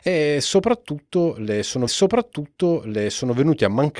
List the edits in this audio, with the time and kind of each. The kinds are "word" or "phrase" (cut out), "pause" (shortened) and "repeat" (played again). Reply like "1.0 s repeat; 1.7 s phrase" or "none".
1.9 s repeat